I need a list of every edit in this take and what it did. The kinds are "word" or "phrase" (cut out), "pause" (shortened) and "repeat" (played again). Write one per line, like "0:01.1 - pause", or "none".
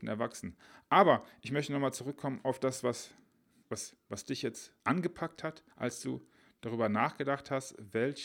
0:03.6 - phrase
0:04.8 - pause
0:05.7 - pause